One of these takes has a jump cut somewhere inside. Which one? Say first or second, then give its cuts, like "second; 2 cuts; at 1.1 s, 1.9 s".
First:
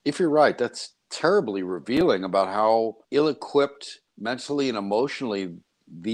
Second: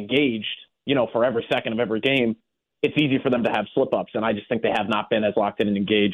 first; 2 cuts; at 3.0 s, 4.1 s